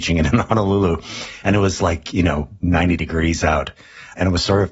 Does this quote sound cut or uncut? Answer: uncut